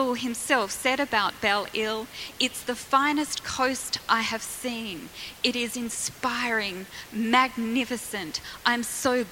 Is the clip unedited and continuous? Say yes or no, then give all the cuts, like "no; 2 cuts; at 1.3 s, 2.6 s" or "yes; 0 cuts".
yes; 0 cuts